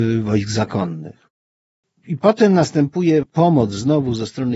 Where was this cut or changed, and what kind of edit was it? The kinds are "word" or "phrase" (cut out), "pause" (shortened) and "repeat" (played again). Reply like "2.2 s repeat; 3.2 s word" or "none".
3.2 s word